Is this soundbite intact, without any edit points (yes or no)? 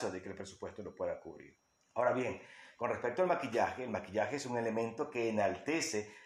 no